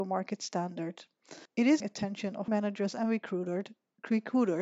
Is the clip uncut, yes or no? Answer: no